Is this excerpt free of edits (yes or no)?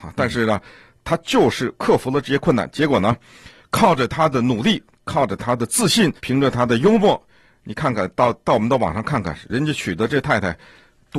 no